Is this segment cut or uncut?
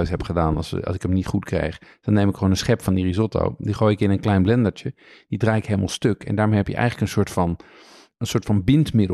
uncut